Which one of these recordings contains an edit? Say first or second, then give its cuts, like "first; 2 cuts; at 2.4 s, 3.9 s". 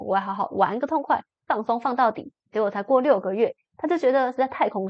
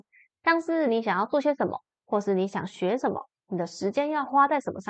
first; 1 cut; at 2.4 s